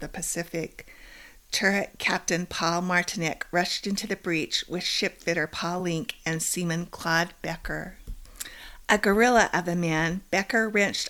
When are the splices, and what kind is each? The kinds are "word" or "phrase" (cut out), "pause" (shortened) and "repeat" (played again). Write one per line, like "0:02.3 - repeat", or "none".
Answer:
none